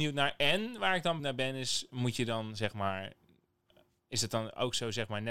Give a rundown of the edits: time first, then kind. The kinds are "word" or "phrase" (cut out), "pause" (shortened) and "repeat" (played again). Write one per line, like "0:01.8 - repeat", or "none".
0:01.2 - word

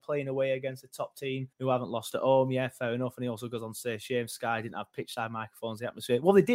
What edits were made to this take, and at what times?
0:01.5 - pause

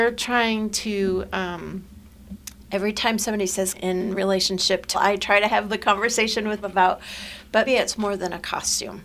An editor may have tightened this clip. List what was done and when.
0:03.7 - word
0:04.9 - word
0:06.6 - word
0:07.7 - word

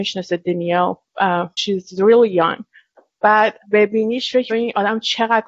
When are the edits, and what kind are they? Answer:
0:01.5 - pause
0:03.6 - word
0:04.5 - word

